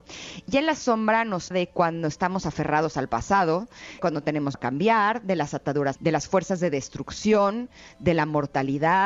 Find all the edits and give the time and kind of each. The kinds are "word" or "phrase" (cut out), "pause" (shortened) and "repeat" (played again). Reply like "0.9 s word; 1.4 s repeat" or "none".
1.5 s word; 4.0 s word; 4.5 s word; 6.0 s word

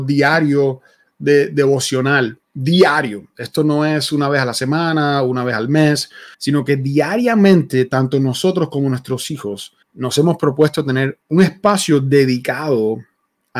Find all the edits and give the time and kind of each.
2.4 s pause; 6.3 s pause; 9.8 s pause; 11.2 s pause

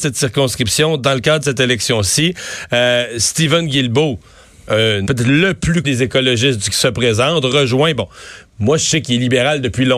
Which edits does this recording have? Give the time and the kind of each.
5.1 s word; 5.8 s word; 6.7 s word

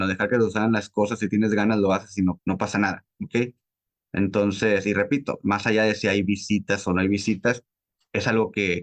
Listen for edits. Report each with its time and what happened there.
2.4 s word

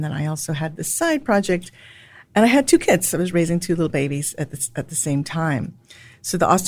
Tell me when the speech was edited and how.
none

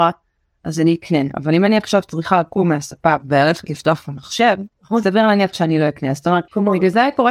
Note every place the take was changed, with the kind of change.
none

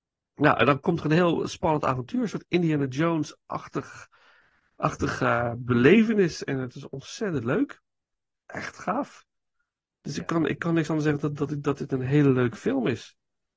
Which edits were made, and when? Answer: none

